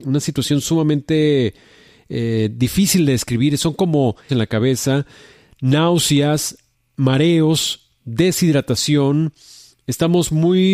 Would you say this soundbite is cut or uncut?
cut